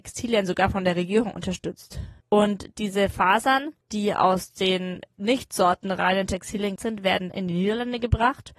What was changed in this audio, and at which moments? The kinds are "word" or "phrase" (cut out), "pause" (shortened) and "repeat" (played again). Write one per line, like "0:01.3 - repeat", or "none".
0:02.2 - pause
0:03.8 - pause
0:06.8 - word
0:07.3 - word